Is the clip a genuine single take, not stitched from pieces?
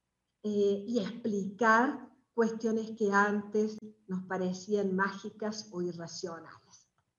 yes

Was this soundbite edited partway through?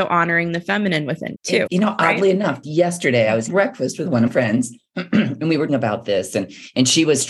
yes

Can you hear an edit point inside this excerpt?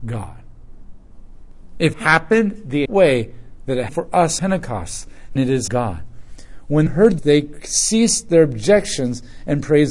yes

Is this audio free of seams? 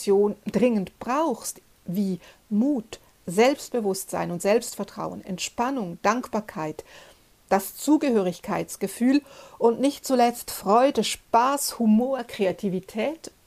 yes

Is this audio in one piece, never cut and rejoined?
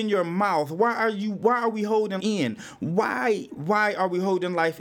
no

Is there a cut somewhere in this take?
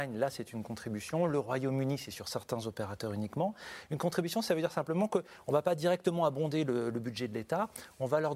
no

